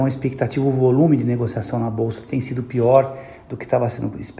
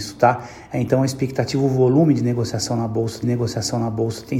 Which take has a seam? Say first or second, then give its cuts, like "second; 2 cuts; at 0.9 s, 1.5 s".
second; 1 cut; at 3.2 s